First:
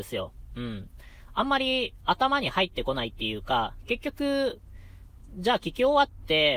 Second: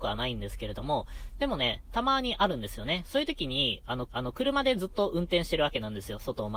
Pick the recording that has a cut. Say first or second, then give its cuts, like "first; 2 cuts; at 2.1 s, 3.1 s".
second; 1 cut; at 4.1 s